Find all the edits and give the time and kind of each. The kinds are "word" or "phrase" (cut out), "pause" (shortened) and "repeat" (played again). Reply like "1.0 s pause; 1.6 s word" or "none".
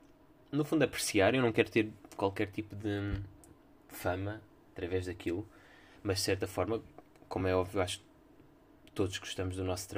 none